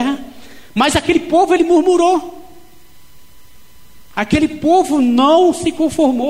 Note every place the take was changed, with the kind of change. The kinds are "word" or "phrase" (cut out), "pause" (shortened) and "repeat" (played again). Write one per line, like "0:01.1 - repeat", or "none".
none